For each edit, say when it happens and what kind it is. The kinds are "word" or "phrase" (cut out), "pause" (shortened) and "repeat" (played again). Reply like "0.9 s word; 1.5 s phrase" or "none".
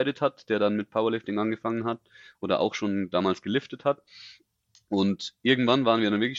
none